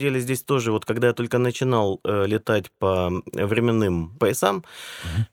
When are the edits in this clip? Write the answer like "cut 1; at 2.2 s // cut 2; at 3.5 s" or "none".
none